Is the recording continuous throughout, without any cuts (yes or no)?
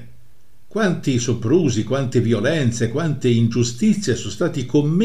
yes